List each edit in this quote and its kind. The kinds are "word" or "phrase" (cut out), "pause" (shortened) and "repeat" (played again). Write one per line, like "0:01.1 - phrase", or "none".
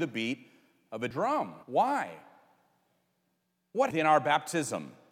0:01.1 - word
0:01.6 - pause
0:03.9 - word